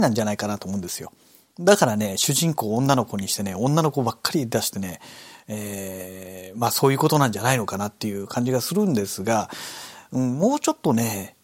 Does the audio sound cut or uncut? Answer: uncut